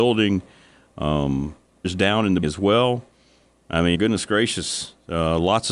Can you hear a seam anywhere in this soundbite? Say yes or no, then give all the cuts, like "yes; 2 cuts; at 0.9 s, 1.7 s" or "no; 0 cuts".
yes; 3 cuts; at 1.8 s, 2.4 s, 3.9 s